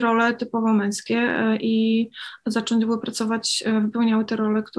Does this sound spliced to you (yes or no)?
no